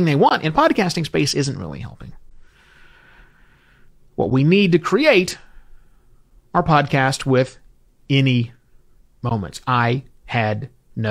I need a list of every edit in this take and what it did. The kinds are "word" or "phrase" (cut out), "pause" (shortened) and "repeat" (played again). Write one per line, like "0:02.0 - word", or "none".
none